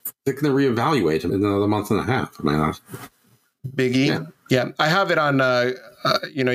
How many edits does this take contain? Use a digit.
1